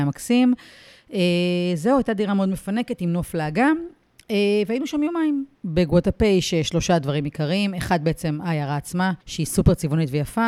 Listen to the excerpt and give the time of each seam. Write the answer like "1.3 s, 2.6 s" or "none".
5.5 s, 9.2 s